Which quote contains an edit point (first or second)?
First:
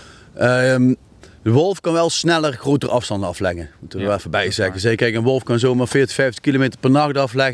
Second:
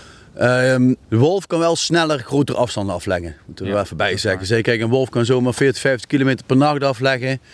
second